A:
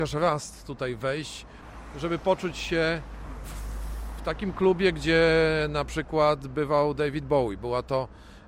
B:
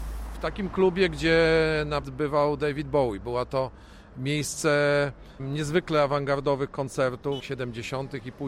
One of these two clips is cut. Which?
B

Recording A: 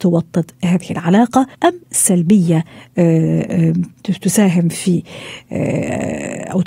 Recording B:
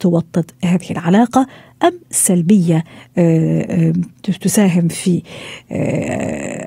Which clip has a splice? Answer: A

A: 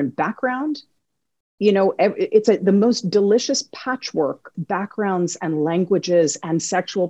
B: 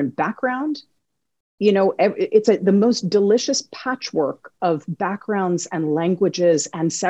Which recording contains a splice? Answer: A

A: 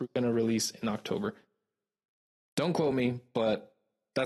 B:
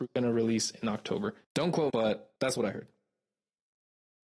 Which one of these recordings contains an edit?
B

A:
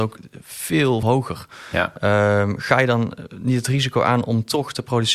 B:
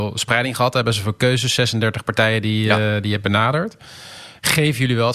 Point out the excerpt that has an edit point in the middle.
A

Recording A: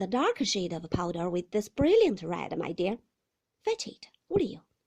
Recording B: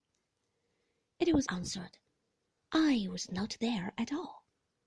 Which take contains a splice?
B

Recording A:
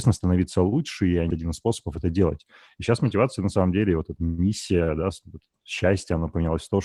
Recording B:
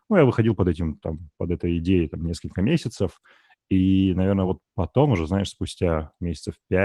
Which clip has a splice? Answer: A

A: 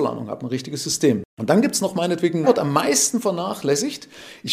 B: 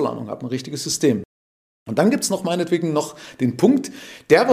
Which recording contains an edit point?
A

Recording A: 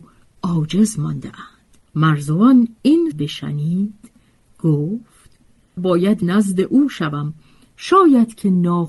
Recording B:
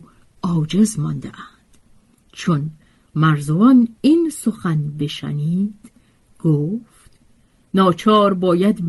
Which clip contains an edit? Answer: A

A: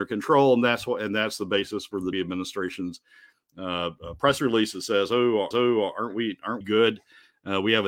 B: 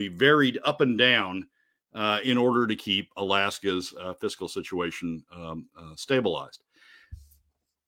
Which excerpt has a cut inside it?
A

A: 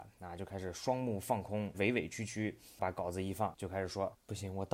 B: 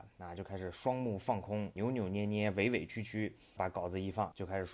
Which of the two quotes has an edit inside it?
A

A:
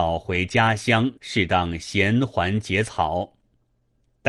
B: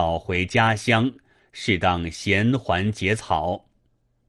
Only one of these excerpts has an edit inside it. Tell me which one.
A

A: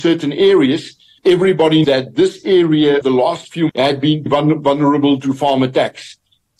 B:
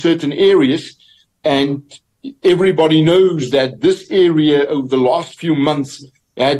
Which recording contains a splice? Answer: A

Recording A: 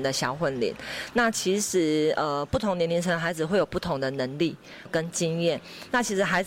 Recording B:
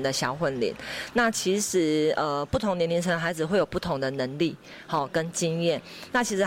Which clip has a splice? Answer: A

